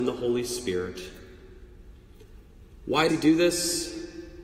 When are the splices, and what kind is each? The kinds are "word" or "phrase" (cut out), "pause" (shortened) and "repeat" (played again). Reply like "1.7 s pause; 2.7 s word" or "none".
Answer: 3.1 s word